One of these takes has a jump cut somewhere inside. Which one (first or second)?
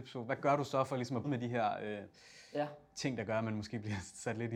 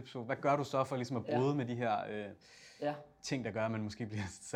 first